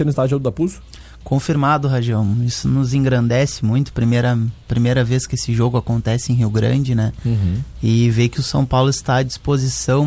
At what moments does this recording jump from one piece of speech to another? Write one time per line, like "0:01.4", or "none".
none